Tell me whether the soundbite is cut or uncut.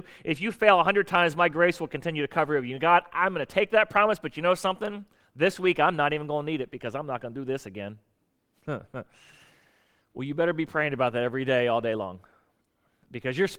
uncut